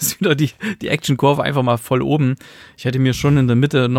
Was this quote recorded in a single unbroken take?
yes; 0 cuts

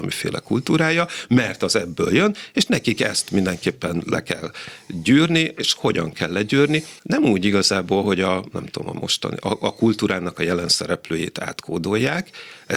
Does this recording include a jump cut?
yes; 1 cut; at 7.0 s

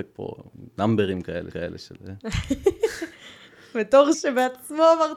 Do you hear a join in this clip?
yes; 2 cuts; at 1.5 s, 4.1 s

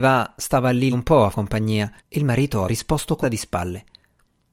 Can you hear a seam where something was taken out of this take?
yes; 5 cuts; at 0.9 s, 1.3 s, 2.0 s, 2.7 s, 3.2 s

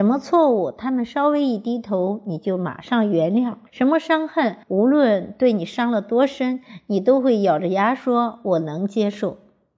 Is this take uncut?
no; 2 cuts; at 3.7 s, 4.6 s

